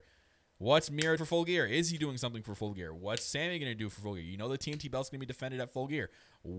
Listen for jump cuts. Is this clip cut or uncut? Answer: cut